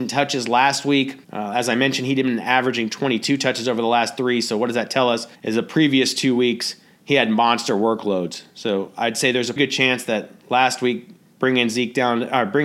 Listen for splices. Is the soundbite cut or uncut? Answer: cut